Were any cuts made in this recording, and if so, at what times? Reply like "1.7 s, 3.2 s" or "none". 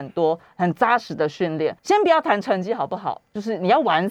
1.8 s